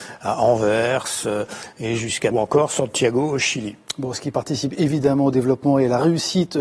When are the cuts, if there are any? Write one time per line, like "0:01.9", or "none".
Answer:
0:02.3